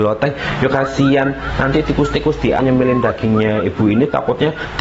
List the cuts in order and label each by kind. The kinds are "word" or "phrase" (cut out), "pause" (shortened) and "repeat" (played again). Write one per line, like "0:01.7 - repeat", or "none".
0:02.6 - phrase

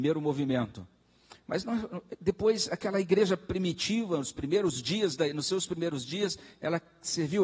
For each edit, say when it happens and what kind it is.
none

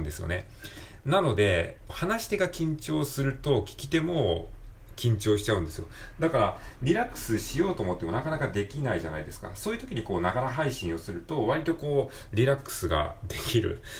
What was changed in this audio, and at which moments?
0:01.9 - phrase

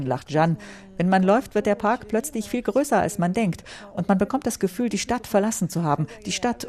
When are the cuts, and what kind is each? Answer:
none

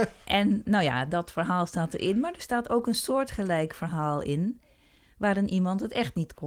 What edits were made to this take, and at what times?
none

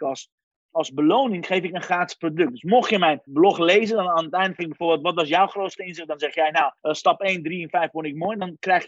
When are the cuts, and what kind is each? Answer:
0:03.3 - word
0:04.6 - word
0:06.8 - pause

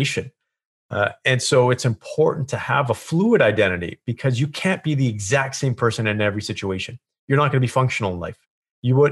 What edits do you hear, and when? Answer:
none

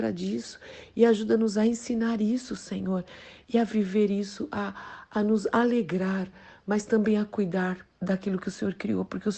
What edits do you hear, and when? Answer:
none

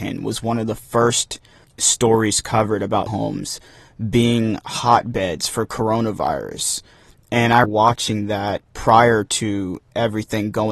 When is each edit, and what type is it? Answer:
0:01.6 - word
0:03.1 - word
0:07.6 - word
0:08.7 - word

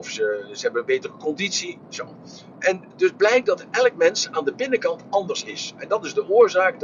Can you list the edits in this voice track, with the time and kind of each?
0:01.8 - pause

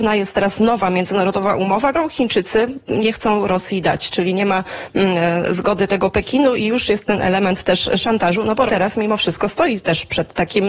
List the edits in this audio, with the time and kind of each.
0:01.9 - word
0:08.7 - word

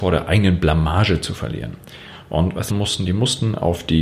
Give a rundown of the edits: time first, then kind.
0:02.7 - phrase

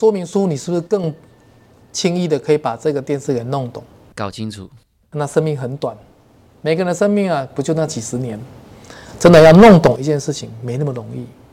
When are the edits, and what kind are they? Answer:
none

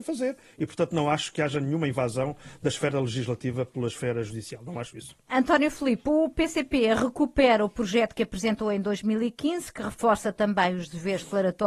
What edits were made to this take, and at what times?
none

